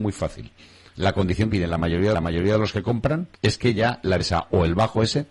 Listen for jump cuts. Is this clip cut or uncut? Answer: cut